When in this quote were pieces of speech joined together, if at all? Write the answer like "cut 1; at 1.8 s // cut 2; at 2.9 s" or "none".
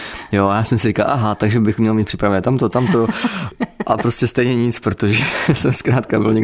none